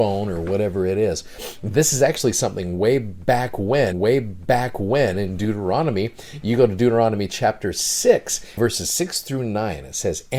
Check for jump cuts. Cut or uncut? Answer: cut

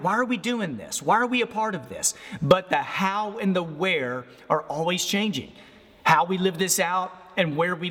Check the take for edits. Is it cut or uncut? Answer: uncut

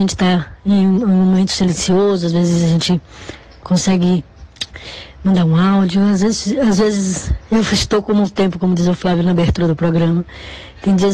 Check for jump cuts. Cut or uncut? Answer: uncut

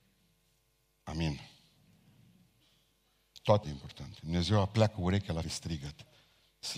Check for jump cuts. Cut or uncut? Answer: cut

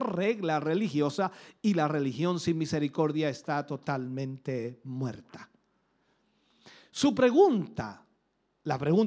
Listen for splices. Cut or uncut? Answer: uncut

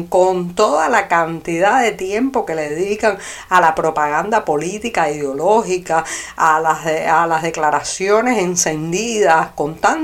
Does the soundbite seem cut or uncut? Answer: uncut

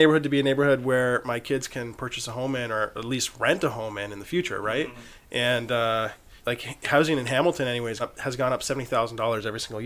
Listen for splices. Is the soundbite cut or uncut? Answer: cut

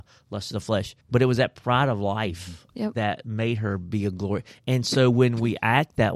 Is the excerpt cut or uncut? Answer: cut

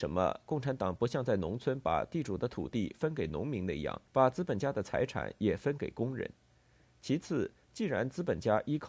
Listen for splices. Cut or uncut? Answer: cut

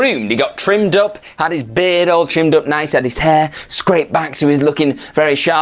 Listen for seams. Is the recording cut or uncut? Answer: uncut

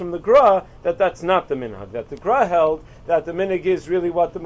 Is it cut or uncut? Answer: uncut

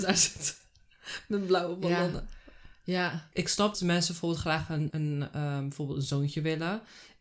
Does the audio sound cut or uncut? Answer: cut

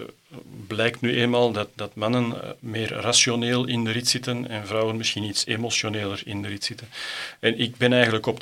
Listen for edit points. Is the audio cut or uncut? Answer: uncut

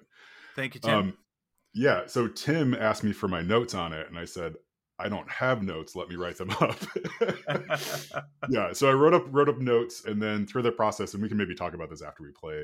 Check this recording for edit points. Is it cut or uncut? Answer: cut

